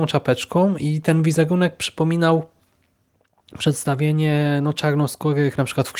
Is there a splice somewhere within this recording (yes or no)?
no